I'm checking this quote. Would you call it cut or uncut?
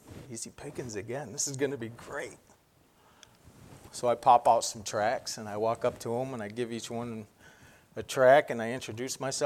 uncut